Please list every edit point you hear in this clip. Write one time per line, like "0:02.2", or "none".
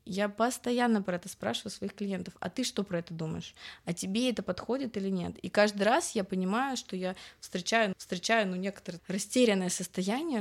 0:07.9
0:09.0